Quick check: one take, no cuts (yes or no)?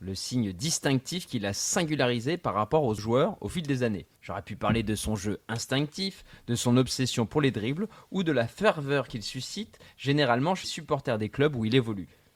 no